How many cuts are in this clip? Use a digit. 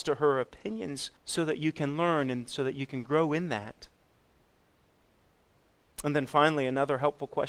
1